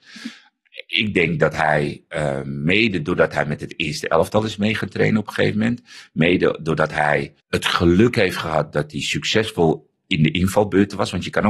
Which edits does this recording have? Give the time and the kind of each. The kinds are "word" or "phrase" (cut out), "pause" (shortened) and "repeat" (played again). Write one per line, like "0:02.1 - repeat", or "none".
0:07.4 - pause